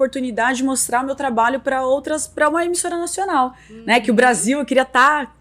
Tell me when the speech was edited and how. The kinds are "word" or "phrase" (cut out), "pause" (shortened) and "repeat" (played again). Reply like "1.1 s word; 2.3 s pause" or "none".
none

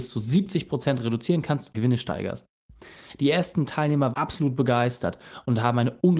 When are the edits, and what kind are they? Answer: 1.7 s phrase; 4.1 s word

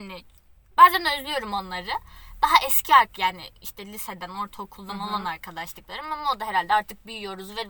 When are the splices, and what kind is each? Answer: none

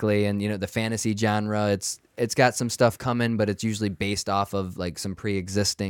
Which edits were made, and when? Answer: none

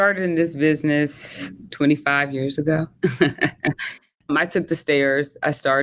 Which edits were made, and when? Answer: 1.7 s word; 4.3 s word

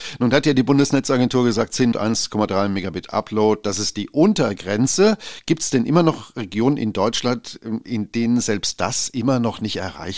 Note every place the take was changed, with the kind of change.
1.9 s phrase

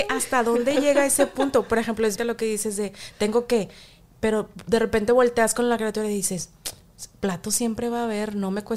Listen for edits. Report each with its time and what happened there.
2.2 s phrase

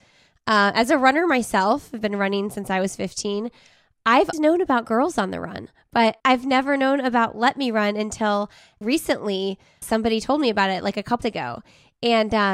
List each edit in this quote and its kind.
4.3 s word; 6.2 s pause; 8.8 s word; 9.8 s word; 11.2 s word

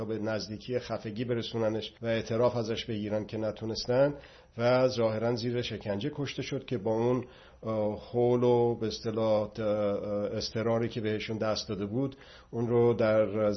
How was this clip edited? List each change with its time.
2.0 s pause

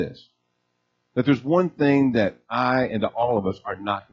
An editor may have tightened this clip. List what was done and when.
none

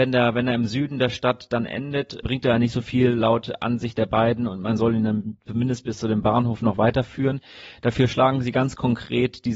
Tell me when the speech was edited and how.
2.2 s word

